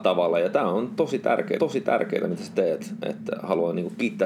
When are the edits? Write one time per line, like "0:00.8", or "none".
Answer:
0:01.6